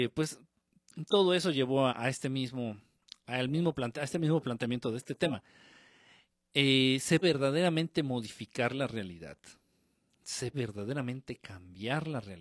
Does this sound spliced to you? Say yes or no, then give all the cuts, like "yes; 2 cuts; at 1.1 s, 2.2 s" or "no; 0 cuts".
yes; 3 cuts; at 1.9 s, 7.2 s, 10.5 s